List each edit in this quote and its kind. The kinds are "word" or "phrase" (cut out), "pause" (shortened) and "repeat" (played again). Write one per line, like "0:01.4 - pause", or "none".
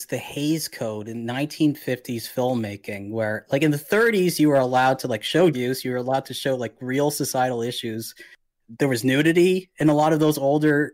0:05.5 - word